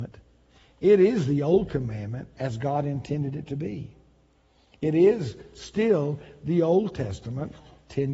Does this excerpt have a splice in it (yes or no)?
no